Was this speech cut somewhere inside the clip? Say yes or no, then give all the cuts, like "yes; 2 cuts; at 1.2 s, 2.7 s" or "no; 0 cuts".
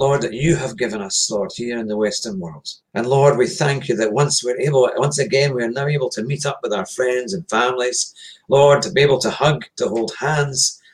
yes; 2 cuts; at 2.8 s, 9.7 s